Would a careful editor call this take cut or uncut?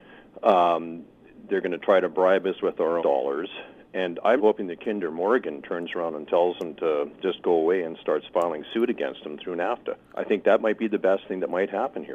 cut